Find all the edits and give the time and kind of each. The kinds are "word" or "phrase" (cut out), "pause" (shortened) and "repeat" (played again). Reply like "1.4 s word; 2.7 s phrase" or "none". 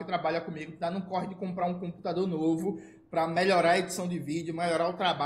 none